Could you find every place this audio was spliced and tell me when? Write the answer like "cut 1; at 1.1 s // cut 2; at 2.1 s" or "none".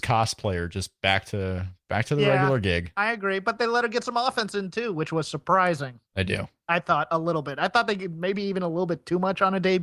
cut 1; at 6.1 s